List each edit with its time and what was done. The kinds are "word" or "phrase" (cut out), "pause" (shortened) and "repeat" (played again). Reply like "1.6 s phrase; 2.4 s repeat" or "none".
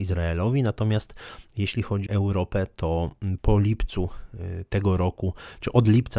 2.1 s word; 3.4 s word